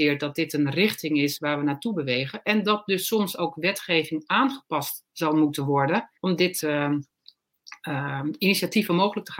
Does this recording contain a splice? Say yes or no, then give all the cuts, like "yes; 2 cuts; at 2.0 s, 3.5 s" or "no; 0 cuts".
yes; 2 cuts; at 6.2 s, 6.6 s